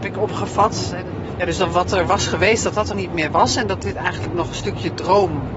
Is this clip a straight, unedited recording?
no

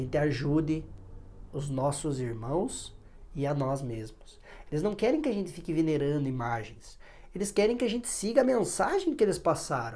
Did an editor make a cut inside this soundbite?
no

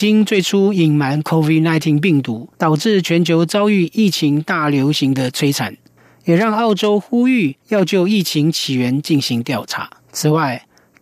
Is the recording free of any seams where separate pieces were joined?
no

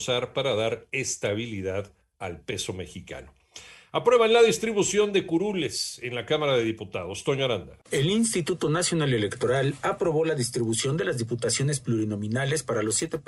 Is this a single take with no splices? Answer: yes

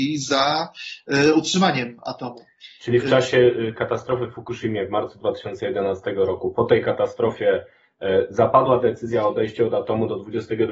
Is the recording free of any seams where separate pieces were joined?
yes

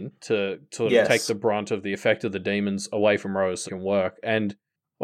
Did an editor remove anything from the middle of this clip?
yes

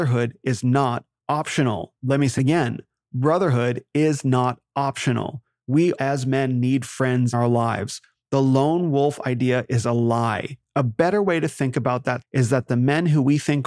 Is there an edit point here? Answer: yes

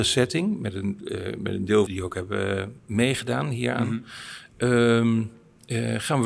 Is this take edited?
yes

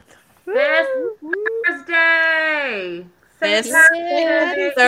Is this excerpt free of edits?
yes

